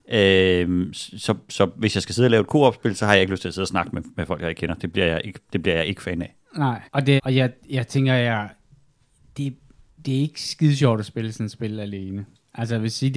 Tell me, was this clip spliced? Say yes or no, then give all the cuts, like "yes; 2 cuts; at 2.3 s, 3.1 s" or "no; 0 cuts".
yes; 3 cuts; at 6.9 s, 7.2 s, 10.0 s